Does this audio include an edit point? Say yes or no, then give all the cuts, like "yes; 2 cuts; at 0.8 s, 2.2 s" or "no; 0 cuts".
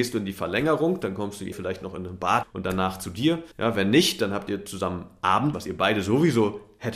yes; 4 cuts; at 1.5 s, 2.4 s, 3.5 s, 5.5 s